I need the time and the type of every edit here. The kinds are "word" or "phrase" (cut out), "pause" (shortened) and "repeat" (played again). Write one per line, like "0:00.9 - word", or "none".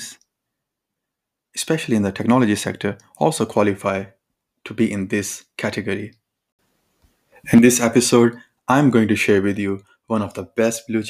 none